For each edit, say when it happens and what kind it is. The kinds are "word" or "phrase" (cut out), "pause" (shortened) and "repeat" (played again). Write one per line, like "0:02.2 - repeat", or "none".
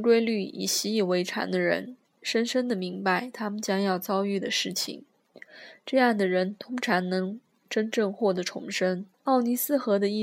0:07.5 - pause
0:09.1 - pause